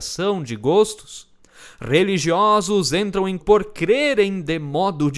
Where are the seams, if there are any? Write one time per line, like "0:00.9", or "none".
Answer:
0:03.4